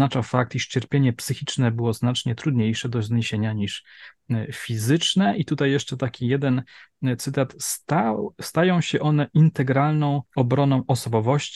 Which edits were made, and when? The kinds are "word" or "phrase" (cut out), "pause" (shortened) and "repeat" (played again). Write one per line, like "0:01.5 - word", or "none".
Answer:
0:10.3 - pause